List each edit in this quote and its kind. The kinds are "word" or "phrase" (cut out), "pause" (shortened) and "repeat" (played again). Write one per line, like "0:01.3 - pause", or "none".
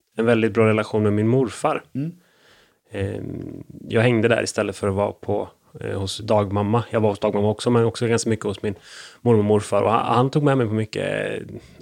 none

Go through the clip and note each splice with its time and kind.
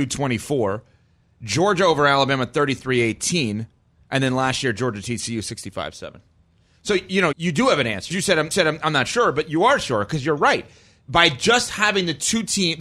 0:07.3 - word
0:08.1 - word
0:08.5 - repeat

